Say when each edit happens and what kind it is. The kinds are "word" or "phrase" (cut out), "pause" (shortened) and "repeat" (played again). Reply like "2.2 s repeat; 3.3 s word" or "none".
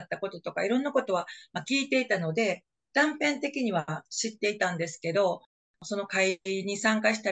none